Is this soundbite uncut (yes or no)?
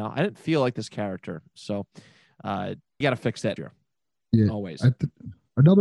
no